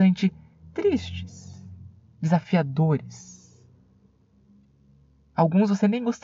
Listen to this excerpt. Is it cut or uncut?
uncut